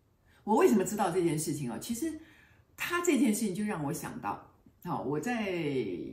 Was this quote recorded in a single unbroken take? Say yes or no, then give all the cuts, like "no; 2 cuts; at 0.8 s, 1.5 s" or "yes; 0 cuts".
yes; 0 cuts